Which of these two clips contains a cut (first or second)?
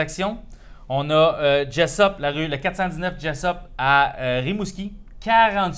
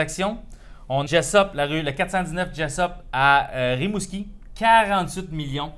second